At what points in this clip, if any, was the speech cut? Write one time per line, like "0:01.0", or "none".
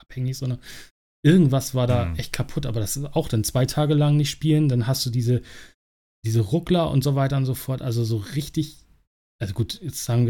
none